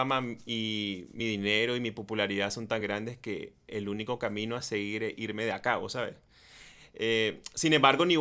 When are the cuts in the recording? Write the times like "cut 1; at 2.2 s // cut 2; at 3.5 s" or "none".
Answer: none